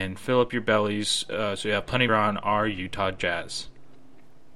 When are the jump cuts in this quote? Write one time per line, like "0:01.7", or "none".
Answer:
0:02.1